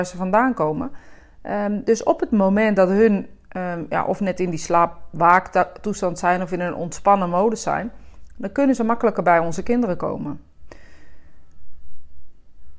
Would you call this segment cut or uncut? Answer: uncut